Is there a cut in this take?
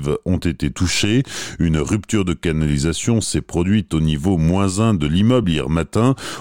no; 0 cuts

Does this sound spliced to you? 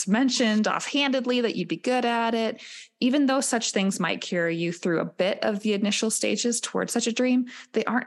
no; 0 cuts

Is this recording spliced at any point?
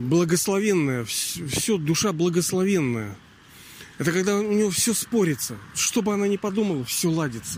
no; 0 cuts

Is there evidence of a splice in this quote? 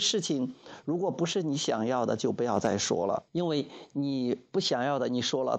yes; 1 cut; at 3.3 s

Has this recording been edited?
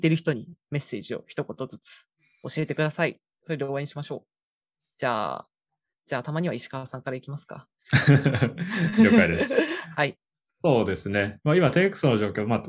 no; 0 cuts

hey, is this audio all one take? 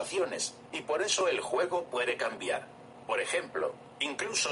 yes; 0 cuts

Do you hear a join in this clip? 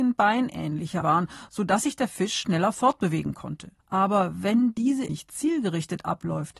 yes; 3 cuts; at 1.0 s, 3.8 s, 5.1 s

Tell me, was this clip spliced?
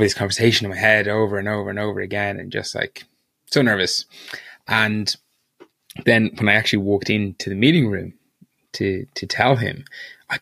no; 0 cuts

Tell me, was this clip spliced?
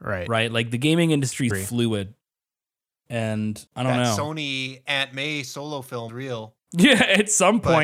yes; 3 cuts; at 1.5 s, 3.7 s, 6.1 s

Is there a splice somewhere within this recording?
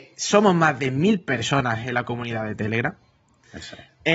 no; 0 cuts

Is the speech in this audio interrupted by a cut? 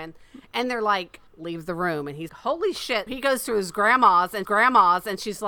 yes; 4 cuts; at 1.3 s, 2.3 s, 3.1 s, 4.4 s

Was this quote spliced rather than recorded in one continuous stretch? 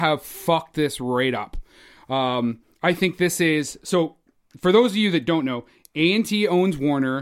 no; 0 cuts

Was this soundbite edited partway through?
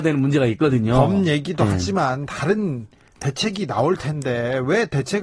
no; 0 cuts

